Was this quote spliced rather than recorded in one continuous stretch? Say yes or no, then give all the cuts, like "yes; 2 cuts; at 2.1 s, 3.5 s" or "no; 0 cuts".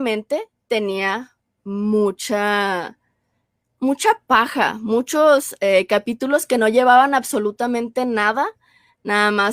no; 0 cuts